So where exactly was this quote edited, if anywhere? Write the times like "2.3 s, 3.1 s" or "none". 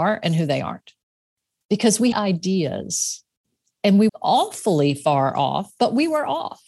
2.1 s, 4.1 s